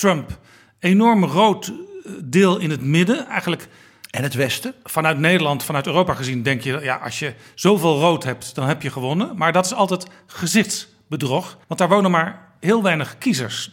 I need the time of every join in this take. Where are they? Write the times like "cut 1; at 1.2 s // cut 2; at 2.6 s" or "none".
cut 1; at 11.6 s